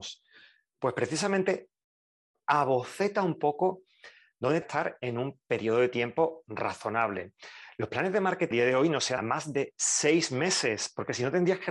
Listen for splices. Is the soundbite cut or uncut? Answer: cut